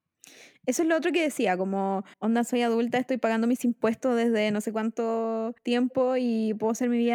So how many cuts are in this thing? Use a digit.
2